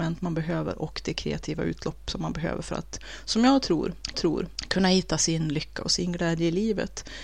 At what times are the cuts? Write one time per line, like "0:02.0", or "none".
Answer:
0:04.1